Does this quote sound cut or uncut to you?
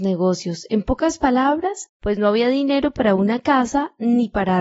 cut